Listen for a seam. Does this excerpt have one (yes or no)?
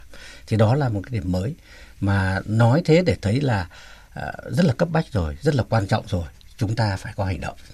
no